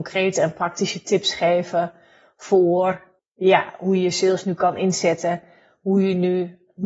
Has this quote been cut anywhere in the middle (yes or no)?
no